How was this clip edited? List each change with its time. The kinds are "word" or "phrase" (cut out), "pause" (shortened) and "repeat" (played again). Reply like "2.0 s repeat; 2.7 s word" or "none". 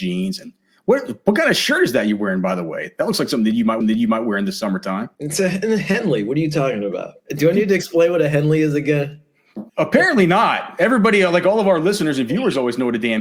3.8 s repeat; 5.1 s pause; 7.2 s pause; 9.7 s pause